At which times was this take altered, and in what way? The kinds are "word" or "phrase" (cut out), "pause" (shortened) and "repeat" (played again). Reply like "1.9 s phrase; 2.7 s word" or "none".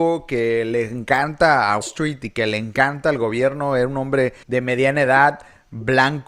1.8 s word; 4.4 s word